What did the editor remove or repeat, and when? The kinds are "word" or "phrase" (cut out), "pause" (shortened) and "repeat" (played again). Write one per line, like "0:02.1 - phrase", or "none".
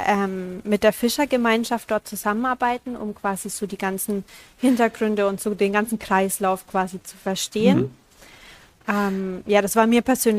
none